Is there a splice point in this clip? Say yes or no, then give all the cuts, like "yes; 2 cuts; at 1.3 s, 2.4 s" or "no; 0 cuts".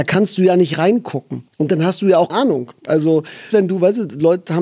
yes; 3 cuts; at 1.5 s, 2.3 s, 3.5 s